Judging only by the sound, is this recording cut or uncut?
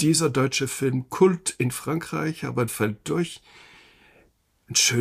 cut